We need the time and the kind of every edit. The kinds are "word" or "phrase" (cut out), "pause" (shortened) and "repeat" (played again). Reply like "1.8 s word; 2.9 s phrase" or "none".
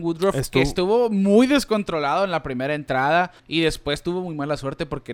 3.4 s pause